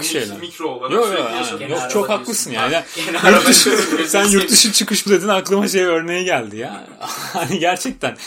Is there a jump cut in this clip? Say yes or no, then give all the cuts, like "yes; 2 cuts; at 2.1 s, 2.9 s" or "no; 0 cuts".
yes; 1 cut; at 5.1 s